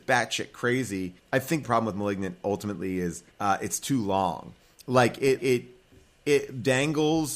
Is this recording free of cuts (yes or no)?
no